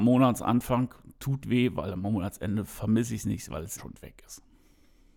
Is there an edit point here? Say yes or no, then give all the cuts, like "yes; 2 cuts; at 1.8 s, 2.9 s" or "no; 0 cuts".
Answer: yes; 2 cuts; at 1.4 s, 3.8 s